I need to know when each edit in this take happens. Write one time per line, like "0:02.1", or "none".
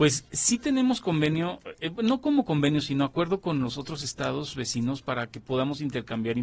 none